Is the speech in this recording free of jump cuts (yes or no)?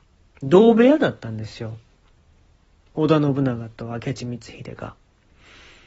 yes